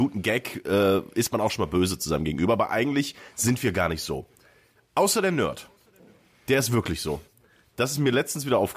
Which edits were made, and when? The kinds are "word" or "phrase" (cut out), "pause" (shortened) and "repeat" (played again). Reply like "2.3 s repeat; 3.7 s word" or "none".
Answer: none